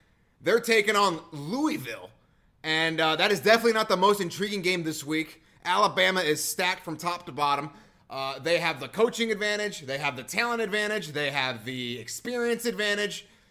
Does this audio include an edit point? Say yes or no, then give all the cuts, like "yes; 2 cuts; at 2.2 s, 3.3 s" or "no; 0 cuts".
no; 0 cuts